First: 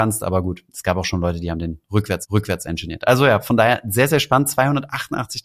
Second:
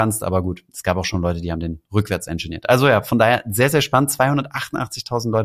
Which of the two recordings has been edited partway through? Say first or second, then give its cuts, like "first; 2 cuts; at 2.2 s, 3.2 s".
first; 1 cut; at 2.2 s